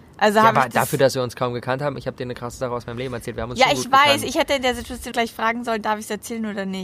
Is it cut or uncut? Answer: cut